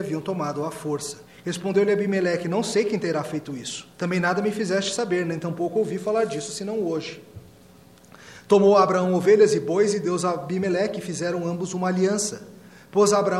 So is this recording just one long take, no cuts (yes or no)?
no